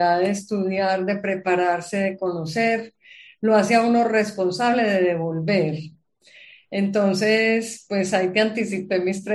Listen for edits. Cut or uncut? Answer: uncut